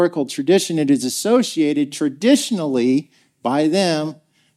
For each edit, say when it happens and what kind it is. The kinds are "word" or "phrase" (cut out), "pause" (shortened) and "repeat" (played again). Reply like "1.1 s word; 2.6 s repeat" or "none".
none